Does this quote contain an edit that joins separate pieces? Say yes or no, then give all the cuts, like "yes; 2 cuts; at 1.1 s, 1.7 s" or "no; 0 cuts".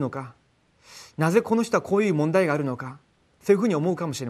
no; 0 cuts